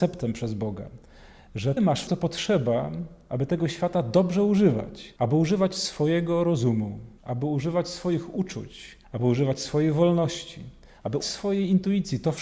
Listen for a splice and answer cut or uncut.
cut